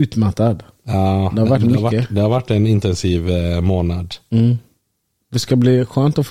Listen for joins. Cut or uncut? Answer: uncut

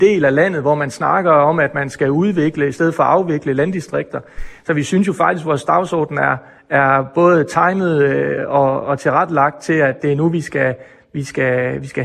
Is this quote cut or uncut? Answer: uncut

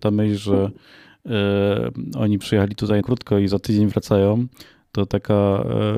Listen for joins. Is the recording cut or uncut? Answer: cut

